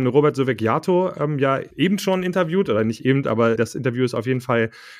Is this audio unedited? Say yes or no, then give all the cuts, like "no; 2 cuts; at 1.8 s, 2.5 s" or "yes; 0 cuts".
no; 2 cuts; at 1.7 s, 3.6 s